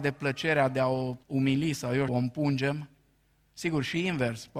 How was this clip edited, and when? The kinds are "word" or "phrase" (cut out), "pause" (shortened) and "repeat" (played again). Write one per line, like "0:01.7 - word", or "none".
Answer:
0:01.2 - pause
0:02.1 - word